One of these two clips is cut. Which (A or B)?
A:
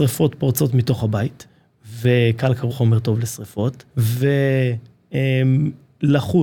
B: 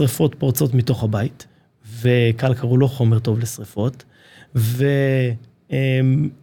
A